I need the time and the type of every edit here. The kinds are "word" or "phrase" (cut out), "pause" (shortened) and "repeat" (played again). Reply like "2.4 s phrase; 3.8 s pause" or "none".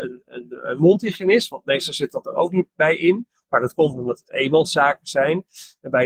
none